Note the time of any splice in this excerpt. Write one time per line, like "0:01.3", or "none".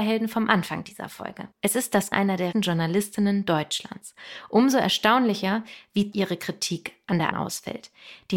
0:01.5
0:02.1
0:02.5
0:06.1
0:07.3